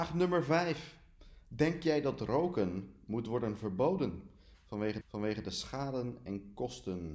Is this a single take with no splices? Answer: no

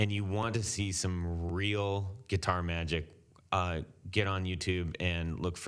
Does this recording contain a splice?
no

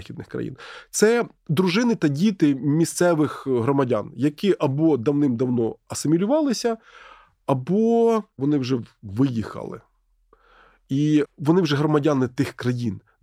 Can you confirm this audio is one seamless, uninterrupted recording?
yes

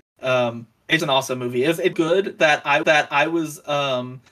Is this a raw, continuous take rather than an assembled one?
no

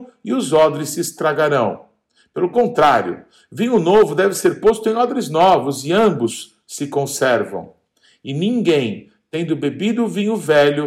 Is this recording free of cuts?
yes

